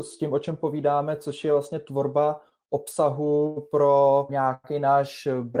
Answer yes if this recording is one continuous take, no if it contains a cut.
no